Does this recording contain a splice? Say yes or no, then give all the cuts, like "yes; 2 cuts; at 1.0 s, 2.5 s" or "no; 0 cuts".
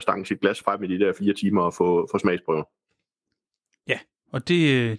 no; 0 cuts